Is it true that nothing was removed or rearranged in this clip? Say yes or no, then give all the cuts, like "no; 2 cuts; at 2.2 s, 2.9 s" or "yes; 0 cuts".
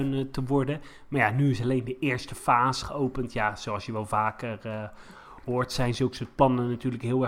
no; 1 cut; at 2.8 s